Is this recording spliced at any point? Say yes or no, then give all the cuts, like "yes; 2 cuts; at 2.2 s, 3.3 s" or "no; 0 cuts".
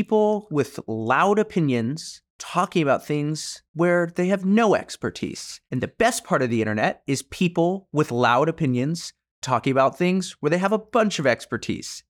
yes; 3 cuts; at 2.3 s, 3.7 s, 5.6 s